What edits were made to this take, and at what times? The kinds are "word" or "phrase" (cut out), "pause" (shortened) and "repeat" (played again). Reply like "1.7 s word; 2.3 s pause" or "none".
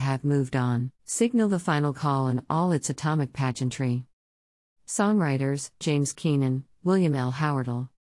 1.0 s pause; 1.9 s word; 5.8 s word